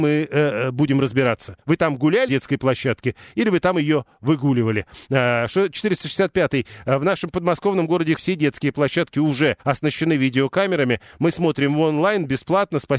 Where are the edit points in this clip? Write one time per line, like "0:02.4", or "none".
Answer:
0:01.6
0:02.3
0:08.2
0:09.6